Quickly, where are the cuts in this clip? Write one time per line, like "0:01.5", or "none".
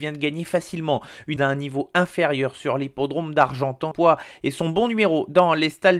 0:01.4
0:03.9